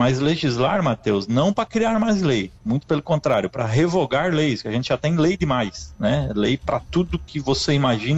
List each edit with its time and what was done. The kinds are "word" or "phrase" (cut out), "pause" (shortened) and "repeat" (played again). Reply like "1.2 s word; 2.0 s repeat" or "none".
2.6 s pause